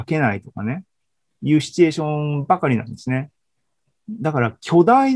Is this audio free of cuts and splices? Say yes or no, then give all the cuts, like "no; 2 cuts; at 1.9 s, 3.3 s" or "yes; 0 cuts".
yes; 0 cuts